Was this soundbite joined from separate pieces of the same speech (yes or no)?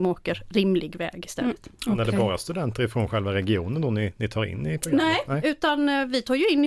no